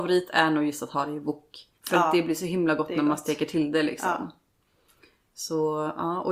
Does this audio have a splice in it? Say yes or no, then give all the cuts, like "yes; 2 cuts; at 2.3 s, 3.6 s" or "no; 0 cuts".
yes; 1 cut; at 1.8 s